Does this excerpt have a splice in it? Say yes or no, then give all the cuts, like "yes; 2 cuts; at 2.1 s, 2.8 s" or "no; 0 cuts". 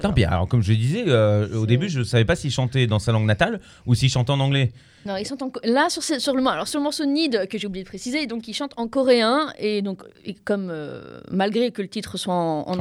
no; 0 cuts